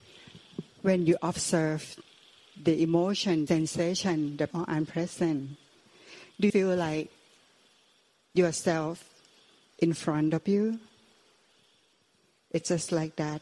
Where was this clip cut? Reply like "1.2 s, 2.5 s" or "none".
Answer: 3.5 s, 4.5 s, 6.5 s, 9.7 s